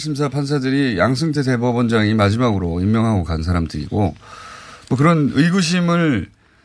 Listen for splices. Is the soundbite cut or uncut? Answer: uncut